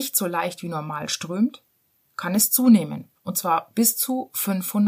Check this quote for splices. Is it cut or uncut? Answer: uncut